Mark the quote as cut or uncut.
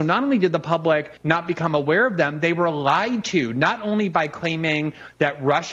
cut